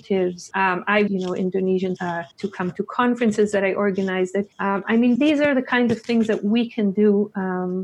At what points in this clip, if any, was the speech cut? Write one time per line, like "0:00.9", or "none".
0:01.1
0:02.0
0:02.3
0:04.5
0:05.2